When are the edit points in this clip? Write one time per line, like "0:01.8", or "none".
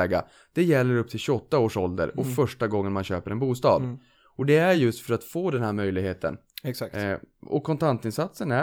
none